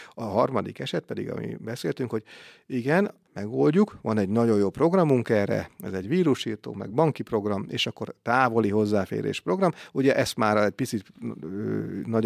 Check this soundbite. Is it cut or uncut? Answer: uncut